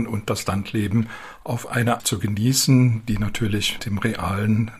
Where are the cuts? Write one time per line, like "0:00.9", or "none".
0:02.0
0:03.8